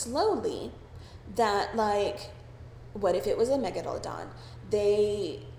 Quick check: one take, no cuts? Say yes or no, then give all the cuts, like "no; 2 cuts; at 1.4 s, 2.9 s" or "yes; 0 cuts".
yes; 0 cuts